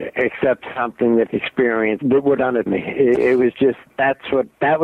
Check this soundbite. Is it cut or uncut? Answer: cut